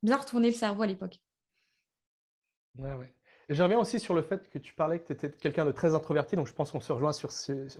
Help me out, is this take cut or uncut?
uncut